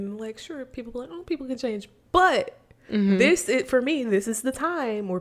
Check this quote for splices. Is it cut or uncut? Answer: uncut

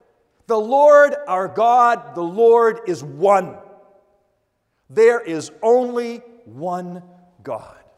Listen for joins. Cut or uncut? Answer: uncut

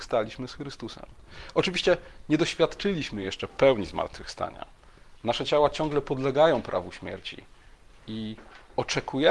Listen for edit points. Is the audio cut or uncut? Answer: uncut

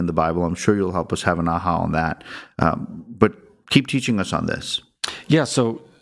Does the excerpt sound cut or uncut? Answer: uncut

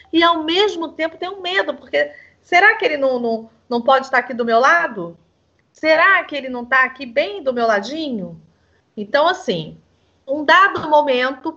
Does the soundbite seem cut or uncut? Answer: uncut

